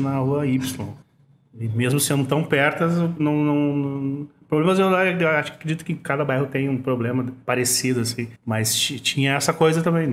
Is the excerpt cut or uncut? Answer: cut